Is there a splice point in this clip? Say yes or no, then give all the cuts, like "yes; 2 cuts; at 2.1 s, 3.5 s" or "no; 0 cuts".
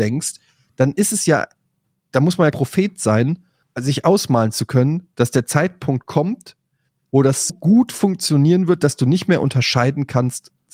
yes; 4 cuts; at 1.9 s, 2.5 s, 3.6 s, 7.5 s